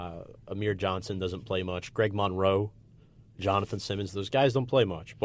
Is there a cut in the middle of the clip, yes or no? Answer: no